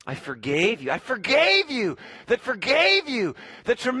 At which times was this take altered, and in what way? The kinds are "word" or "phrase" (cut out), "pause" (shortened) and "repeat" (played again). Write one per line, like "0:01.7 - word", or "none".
0:02.4 - repeat